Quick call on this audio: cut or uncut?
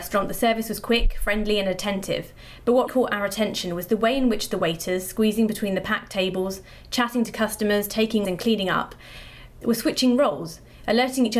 cut